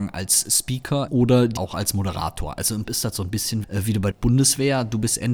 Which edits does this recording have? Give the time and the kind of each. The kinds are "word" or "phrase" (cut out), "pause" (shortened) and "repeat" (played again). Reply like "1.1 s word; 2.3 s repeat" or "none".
1.1 s word; 1.6 s word; 2.8 s word; 3.6 s word; 4.1 s word